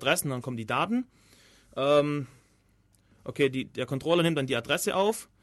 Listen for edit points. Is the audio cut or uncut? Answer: uncut